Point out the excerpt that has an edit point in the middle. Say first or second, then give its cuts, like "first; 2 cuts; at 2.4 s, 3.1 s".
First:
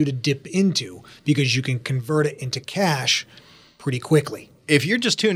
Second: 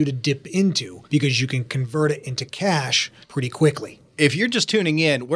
second; 2 cuts; at 1.0 s, 3.2 s